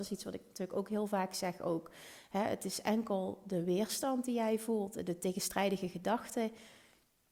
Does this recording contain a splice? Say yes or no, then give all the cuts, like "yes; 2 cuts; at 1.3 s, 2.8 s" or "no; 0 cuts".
no; 0 cuts